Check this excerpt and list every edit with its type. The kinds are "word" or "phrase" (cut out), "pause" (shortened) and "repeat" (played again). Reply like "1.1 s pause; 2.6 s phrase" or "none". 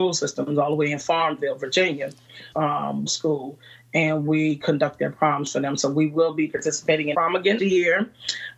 2.5 s phrase; 3.1 s phrase; 7.1 s word; 7.6 s word